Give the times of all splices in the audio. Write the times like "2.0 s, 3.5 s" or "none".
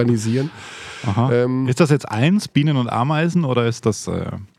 none